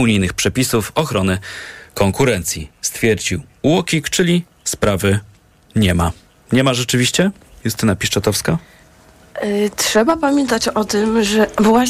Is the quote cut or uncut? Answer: uncut